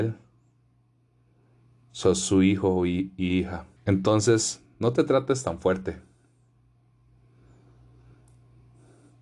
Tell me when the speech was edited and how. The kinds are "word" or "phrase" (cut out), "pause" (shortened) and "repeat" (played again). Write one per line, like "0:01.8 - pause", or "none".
0:03.8 - pause